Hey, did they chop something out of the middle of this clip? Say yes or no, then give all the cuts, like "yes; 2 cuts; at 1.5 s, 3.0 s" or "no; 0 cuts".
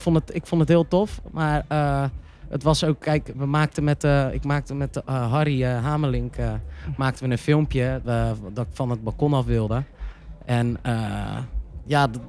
yes; 2 cuts; at 3.3 s, 8.0 s